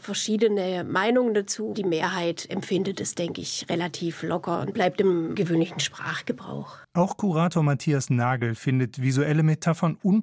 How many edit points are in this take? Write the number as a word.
one